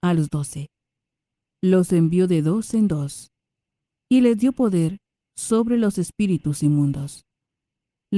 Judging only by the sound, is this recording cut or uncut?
uncut